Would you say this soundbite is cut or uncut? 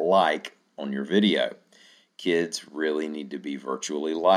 uncut